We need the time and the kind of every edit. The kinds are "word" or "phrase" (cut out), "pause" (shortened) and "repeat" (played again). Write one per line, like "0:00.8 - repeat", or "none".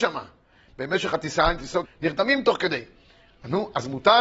0:01.8 - word